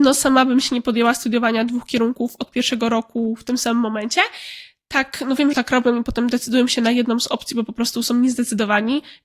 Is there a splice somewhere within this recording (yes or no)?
yes